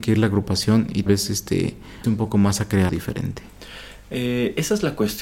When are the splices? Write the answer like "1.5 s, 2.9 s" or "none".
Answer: 1.1 s, 2.0 s, 2.9 s